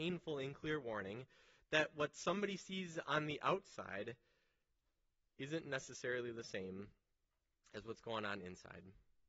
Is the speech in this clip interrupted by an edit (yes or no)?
no